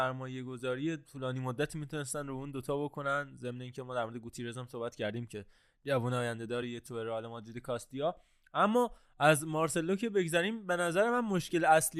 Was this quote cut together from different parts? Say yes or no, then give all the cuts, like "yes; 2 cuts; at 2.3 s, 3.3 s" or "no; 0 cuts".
no; 0 cuts